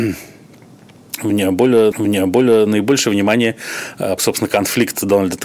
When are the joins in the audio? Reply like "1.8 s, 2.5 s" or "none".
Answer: 1.9 s, 4.2 s

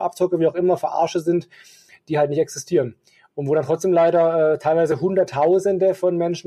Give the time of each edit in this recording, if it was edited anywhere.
none

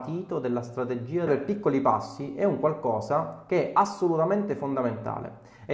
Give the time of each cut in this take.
1.3 s

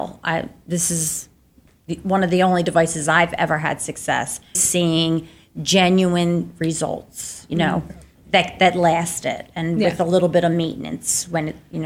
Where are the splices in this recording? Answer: 4.5 s

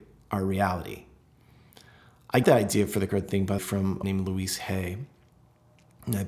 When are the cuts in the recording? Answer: 2.4 s, 3.1 s, 3.6 s, 4.0 s

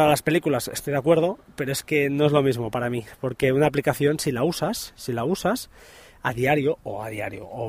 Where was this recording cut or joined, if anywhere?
none

